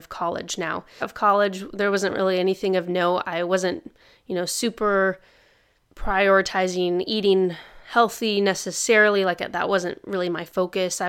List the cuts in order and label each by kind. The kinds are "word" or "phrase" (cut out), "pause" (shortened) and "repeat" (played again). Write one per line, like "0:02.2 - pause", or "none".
0:01.0 - phrase